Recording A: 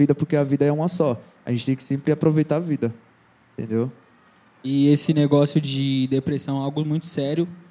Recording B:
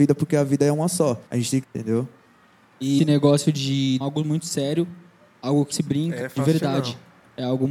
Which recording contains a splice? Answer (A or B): B